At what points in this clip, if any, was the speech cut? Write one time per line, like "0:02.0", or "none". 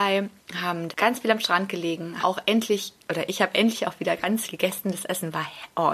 0:00.9
0:02.2
0:04.4